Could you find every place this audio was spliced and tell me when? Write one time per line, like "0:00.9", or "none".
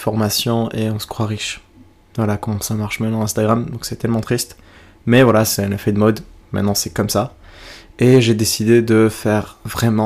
none